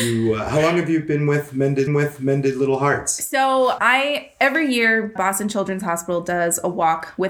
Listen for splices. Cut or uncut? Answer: cut